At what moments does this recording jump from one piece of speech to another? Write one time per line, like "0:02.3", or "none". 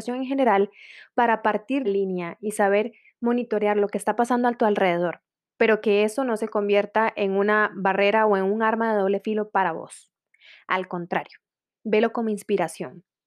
0:01.8